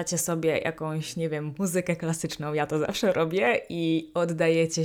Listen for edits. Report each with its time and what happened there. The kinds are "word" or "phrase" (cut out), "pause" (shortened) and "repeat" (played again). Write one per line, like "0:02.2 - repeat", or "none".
none